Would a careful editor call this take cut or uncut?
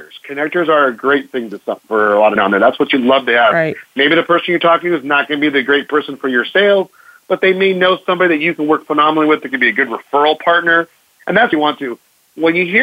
cut